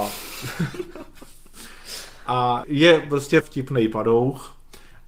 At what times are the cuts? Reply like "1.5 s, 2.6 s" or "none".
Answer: 2.6 s, 3.4 s